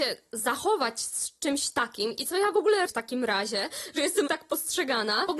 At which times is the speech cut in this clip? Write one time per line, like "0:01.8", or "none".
0:02.9
0:04.3